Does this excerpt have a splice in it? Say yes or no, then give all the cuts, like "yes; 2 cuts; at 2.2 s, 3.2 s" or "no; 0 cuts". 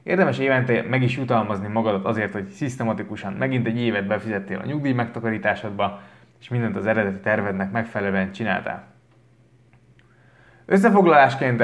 no; 0 cuts